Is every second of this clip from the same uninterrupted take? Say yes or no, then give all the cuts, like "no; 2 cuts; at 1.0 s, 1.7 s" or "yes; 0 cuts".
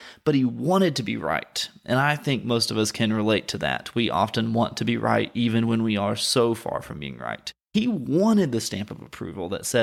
yes; 0 cuts